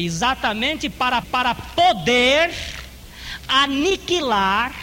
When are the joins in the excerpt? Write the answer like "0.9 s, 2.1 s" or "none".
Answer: 1.2 s